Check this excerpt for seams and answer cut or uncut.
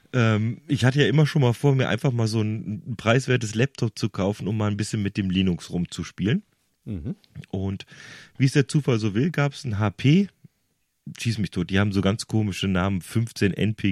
uncut